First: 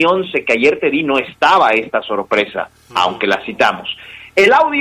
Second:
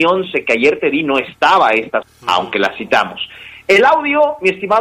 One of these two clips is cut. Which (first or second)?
second